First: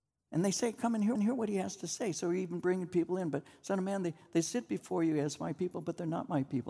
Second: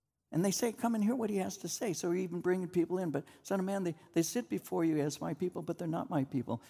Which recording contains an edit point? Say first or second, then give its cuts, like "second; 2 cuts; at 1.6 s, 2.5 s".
first; 1 cut; at 1.2 s